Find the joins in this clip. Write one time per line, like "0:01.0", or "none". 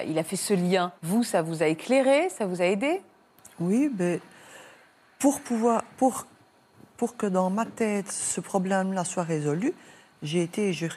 0:01.0